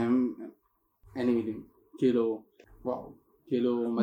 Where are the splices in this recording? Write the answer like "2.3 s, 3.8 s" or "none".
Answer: none